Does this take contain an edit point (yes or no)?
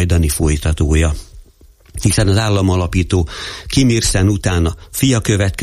no